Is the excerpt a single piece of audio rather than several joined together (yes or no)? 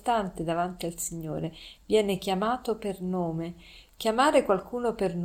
yes